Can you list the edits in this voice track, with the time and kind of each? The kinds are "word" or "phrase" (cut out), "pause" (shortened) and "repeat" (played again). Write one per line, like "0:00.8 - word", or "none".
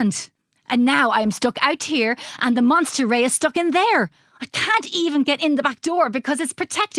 none